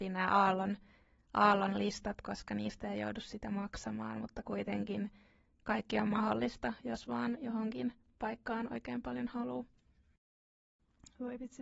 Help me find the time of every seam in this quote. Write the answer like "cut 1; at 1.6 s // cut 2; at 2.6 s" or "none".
none